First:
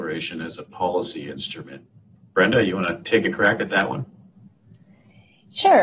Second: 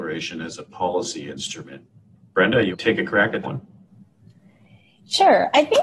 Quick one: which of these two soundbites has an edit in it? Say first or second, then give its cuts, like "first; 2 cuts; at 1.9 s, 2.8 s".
second; 2 cuts; at 2.7 s, 3.4 s